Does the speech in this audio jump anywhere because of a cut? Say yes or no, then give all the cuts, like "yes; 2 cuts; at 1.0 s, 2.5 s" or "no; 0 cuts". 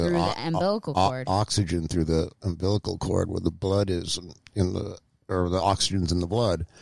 no; 0 cuts